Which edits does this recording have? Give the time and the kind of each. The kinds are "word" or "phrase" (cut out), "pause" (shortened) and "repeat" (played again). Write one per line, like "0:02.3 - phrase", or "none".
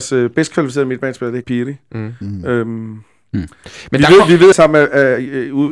0:01.4 - word
0:04.5 - word